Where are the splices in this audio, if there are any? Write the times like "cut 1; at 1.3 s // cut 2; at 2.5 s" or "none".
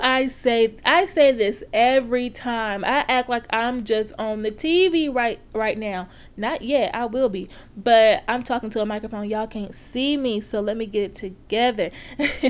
none